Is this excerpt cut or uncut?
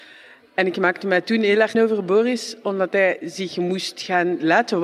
cut